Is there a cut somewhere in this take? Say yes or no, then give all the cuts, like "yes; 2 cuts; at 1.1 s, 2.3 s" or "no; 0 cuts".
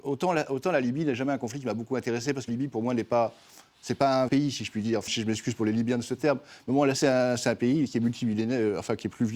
yes; 4 cuts; at 2.5 s, 4.3 s, 5.1 s, 7.0 s